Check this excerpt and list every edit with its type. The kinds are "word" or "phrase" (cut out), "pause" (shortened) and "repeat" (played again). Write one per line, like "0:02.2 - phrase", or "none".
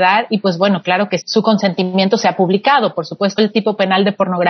0:01.2 - word
0:03.4 - phrase

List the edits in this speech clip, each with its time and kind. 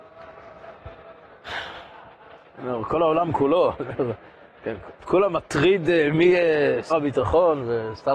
0:06.9 - word

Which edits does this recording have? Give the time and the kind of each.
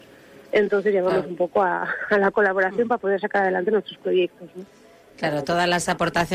none

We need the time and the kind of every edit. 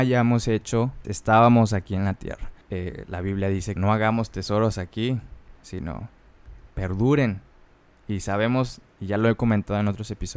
0:01.0 - word
0:02.6 - pause
0:03.8 - word
0:06.7 - phrase

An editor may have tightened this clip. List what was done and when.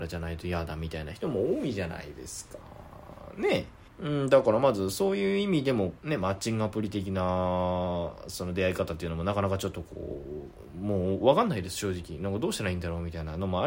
0:03.9 - pause
0:06.0 - pause

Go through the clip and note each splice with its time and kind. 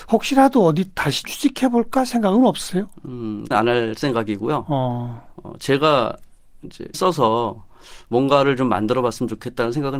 0:01.2 - word
0:03.5 - word
0:06.9 - word

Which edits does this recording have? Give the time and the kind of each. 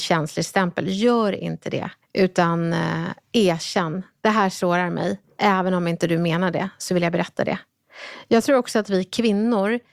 0:02.0 - pause
0:05.2 - pause

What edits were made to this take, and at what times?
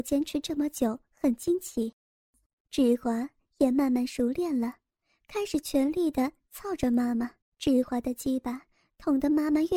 0:07.4 - pause

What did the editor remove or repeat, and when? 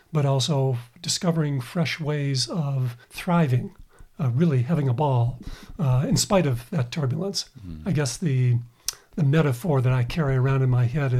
0:03.0 - pause

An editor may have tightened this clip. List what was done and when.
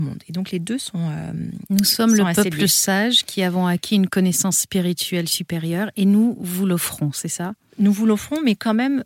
none

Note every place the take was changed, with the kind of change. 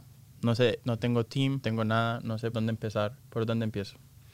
0:01.6 - word
0:02.5 - word
0:03.2 - pause

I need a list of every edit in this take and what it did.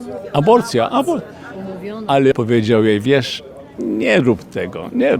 0:02.3 - word
0:03.8 - word

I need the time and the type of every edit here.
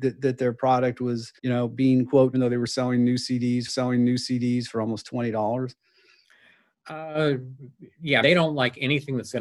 0:01.4 - pause
0:02.3 - phrase
0:03.7 - repeat
0:08.2 - word

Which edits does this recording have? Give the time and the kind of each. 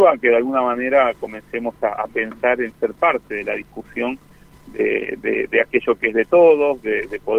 none

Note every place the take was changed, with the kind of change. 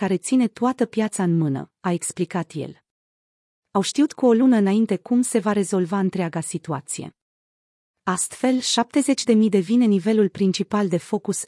none

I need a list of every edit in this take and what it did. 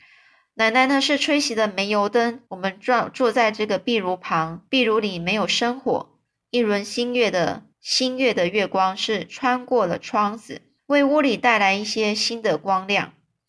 0:02.5 - pause
0:04.7 - pause
0:07.7 - pause
0:10.8 - pause

